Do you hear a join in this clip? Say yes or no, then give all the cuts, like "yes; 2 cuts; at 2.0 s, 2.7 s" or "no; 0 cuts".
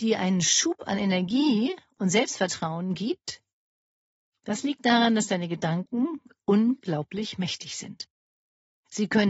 no; 0 cuts